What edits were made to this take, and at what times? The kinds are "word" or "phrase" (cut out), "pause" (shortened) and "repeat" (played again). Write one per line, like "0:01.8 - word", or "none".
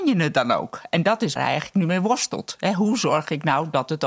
0:01.4 - word